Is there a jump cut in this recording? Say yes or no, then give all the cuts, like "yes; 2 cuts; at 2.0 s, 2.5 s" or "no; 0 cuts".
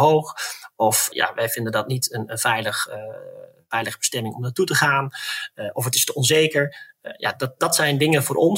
no; 0 cuts